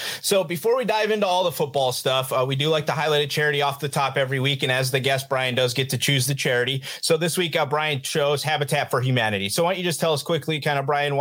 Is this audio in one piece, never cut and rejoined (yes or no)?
yes